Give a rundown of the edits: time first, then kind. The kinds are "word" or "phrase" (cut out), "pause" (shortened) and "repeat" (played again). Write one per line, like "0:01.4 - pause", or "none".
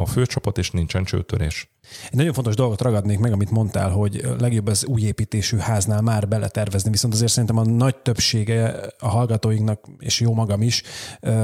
none